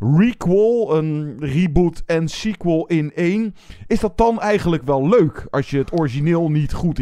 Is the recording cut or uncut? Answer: uncut